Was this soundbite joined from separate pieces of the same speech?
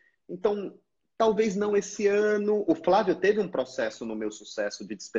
no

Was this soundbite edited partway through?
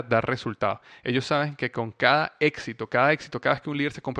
no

